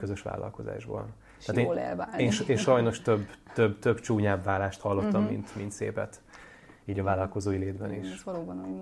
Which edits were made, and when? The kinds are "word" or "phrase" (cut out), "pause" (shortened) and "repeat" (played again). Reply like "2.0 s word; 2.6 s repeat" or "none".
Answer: none